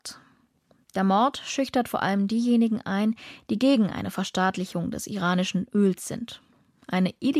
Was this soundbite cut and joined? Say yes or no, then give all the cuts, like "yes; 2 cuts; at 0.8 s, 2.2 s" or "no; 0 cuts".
no; 0 cuts